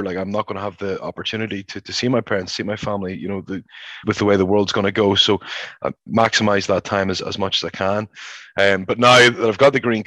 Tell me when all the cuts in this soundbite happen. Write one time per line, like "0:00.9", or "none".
0:04.0
0:06.1